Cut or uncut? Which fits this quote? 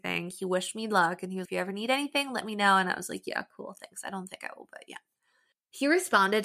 cut